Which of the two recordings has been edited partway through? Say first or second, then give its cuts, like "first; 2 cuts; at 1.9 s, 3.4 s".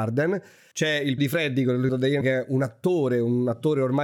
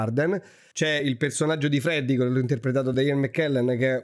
first; 3 cuts; at 1.2 s, 1.9 s, 2.2 s